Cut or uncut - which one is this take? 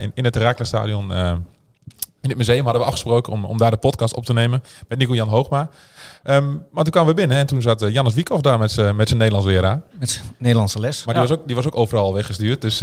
uncut